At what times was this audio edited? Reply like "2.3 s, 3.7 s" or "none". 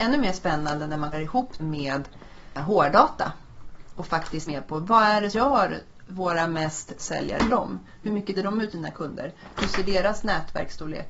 1.1 s, 1.6 s, 4.5 s, 5.3 s, 6.0 s, 7.0 s, 7.5 s, 8.3 s, 8.7 s